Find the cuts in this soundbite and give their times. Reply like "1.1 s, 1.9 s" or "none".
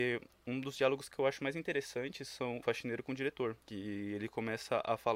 2.6 s, 3.6 s